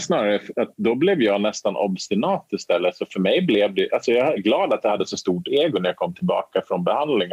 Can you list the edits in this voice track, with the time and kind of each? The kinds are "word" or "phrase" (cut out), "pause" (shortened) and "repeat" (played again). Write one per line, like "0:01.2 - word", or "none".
0:04.4 - word